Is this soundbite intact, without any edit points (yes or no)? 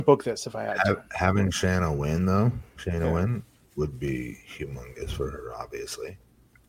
yes